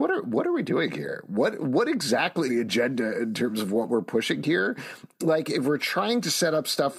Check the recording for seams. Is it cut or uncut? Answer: cut